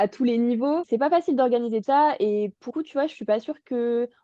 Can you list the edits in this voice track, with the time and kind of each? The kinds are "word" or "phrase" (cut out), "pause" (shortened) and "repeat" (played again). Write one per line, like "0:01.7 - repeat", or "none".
0:01.8 - word
0:02.7 - word